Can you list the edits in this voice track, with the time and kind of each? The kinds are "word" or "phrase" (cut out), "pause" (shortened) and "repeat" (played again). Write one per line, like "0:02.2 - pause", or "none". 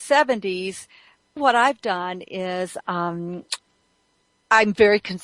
0:01.4 - word
0:02.8 - word